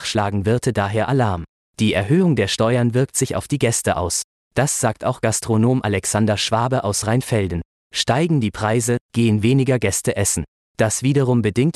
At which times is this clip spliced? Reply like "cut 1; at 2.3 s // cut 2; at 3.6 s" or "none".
none

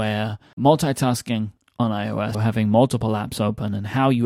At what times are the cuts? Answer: cut 1; at 2.3 s

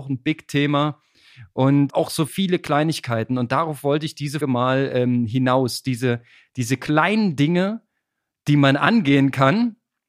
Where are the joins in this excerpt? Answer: cut 1; at 1.9 s // cut 2; at 2.3 s // cut 3; at 4.4 s

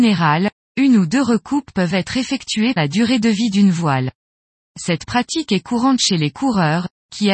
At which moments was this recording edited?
cut 1; at 2.8 s

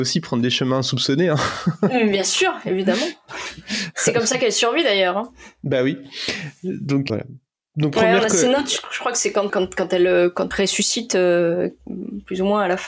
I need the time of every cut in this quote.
cut 1; at 7.1 s // cut 2; at 9.5 s // cut 3; at 10.5 s

